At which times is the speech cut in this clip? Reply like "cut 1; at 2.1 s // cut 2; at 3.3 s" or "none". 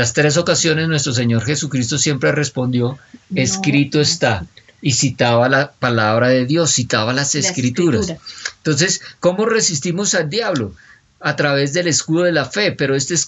none